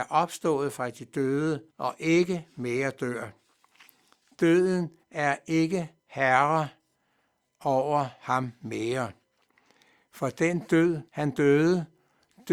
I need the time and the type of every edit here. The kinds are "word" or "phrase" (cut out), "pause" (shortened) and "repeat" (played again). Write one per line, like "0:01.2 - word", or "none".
0:01.7 - pause
0:05.0 - pause
0:06.0 - pause
0:11.1 - pause